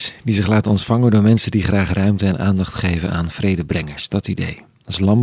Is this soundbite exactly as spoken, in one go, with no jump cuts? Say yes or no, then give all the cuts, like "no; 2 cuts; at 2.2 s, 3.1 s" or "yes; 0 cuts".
yes; 0 cuts